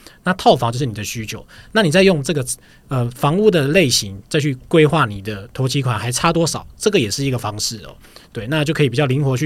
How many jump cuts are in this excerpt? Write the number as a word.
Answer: zero